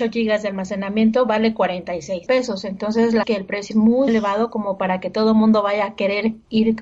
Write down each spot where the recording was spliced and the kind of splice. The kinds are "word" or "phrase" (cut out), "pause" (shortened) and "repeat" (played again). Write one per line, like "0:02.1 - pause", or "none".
0:02.3 - word
0:03.2 - phrase
0:03.7 - word
0:04.1 - word